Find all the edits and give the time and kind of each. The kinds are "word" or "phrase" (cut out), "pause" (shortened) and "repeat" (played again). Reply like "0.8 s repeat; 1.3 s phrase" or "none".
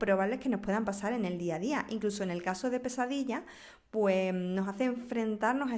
none